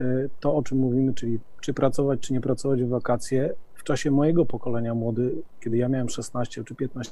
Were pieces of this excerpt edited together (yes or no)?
no